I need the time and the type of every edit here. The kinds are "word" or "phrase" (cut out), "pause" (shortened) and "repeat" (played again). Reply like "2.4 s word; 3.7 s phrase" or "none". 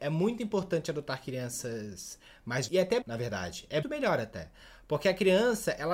2.7 s word; 3.0 s word; 3.8 s word